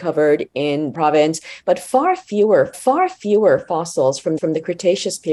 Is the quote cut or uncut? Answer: cut